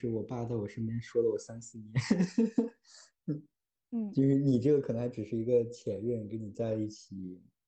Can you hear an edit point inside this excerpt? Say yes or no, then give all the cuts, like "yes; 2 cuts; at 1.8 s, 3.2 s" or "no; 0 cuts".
no; 0 cuts